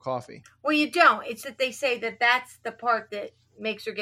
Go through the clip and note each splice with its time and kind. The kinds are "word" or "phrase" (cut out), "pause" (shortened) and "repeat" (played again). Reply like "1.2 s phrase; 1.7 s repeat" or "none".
1.4 s word